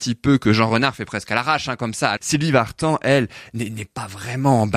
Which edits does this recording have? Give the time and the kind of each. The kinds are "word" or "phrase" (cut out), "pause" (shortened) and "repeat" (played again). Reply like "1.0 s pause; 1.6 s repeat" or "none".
2.2 s word

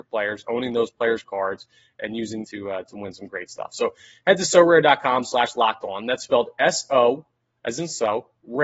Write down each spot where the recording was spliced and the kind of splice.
2.4 s word

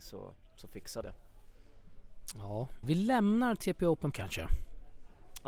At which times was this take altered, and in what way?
1.0 s word; 2.8 s word; 4.1 s word

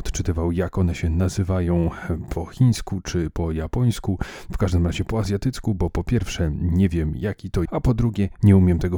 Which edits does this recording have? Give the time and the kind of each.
7.7 s word

